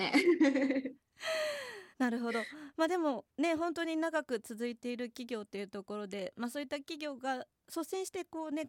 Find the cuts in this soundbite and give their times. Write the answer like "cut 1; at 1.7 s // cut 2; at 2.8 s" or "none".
cut 1; at 1.9 s